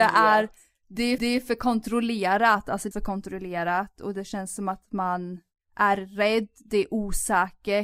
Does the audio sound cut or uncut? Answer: cut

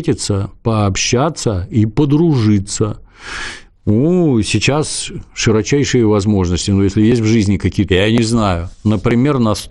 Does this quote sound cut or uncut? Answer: cut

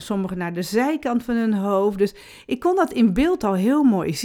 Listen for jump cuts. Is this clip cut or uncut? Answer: uncut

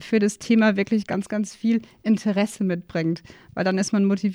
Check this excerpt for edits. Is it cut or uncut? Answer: uncut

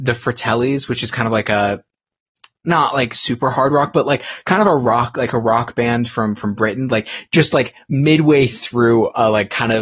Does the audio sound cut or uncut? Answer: uncut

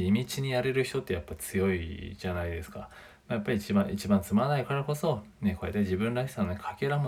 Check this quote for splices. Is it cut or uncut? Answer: uncut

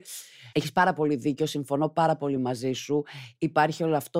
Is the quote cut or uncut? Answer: uncut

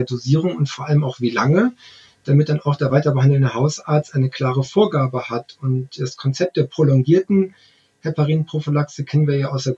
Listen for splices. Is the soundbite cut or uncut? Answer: uncut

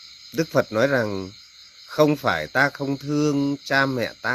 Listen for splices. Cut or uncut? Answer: uncut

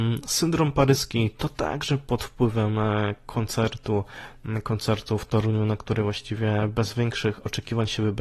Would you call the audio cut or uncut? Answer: uncut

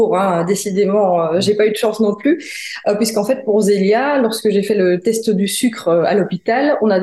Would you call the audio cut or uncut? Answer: uncut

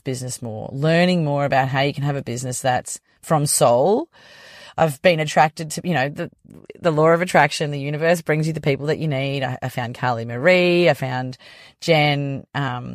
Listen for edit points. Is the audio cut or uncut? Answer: uncut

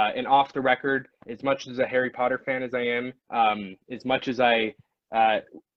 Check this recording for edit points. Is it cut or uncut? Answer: cut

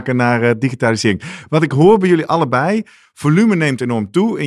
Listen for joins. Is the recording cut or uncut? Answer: uncut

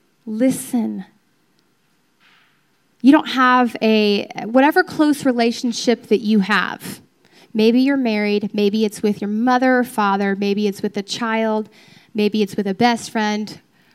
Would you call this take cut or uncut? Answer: uncut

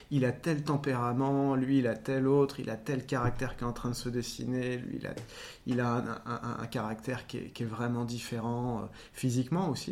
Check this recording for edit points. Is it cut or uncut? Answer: uncut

